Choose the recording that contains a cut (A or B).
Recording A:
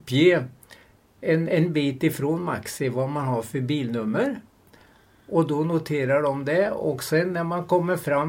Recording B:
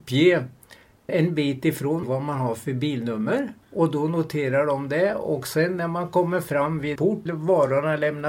B